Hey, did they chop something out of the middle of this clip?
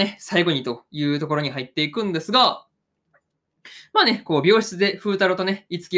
no; 0 cuts

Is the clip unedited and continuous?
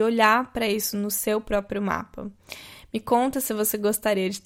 yes; 0 cuts

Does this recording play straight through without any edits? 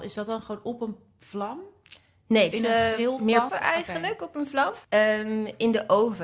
no; 3 cuts; at 2.5 s, 3.5 s, 4.8 s

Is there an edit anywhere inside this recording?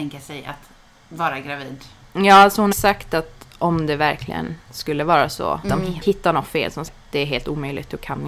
yes; 4 cuts; at 2.7 s, 5.6 s, 6.0 s, 6.9 s

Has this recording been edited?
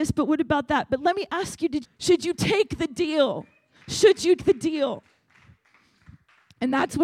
yes; 2 cuts; at 1.8 s, 4.4 s

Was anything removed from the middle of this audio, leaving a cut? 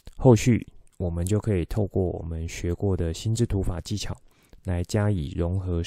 no; 0 cuts

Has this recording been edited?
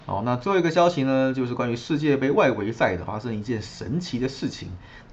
yes; 1 cut; at 3.1 s

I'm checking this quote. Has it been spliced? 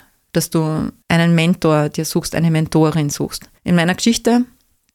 yes; 2 cuts; at 1.0 s, 3.6 s

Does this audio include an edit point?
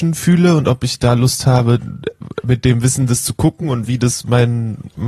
no; 0 cuts

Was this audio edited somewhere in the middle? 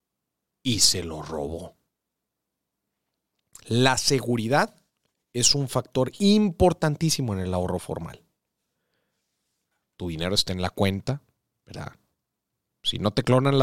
no; 0 cuts

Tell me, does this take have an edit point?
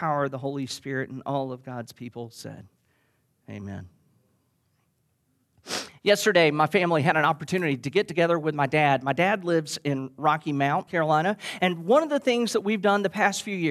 yes; 1 cut; at 10.9 s

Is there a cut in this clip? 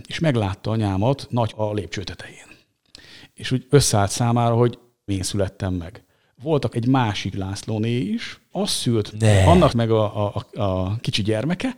yes; 8 cuts; at 1.5 s, 3.7 s, 5.1 s, 6.7 s, 7.3 s, 8.5 s, 9.1 s, 9.7 s

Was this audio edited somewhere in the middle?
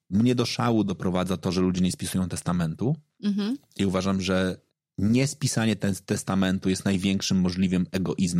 yes; 1 cut; at 4.7 s

